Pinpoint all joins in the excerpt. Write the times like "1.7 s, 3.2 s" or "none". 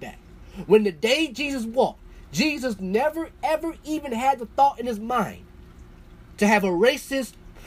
none